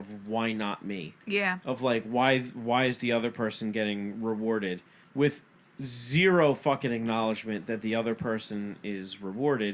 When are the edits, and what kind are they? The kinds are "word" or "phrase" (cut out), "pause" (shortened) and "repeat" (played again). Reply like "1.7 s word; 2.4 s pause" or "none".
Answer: 1.2 s pause; 5.0 s pause